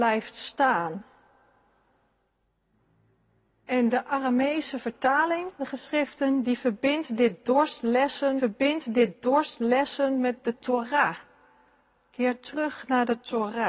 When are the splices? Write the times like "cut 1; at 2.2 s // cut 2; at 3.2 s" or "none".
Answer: cut 1; at 5.6 s // cut 2; at 8.4 s